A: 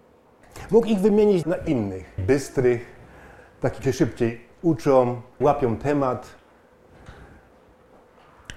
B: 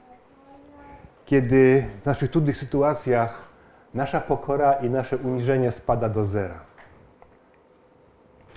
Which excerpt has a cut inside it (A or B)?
A